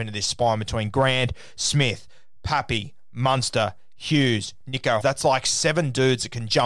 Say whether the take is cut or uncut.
cut